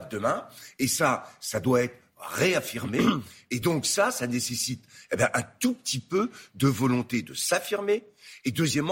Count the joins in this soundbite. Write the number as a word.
zero